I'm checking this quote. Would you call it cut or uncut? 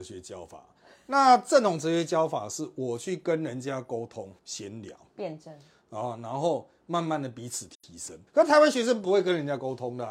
cut